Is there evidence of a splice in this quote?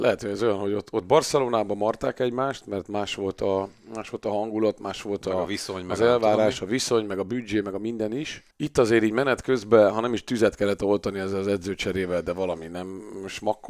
yes; 1 cut; at 8.5 s

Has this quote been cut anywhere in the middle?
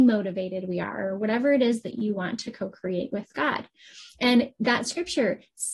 no; 0 cuts

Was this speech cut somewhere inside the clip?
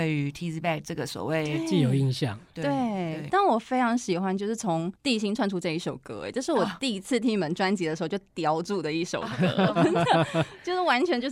yes; 1 cut; at 9.8 s

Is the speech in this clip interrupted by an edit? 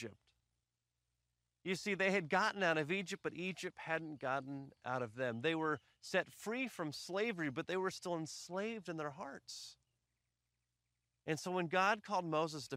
no; 0 cuts

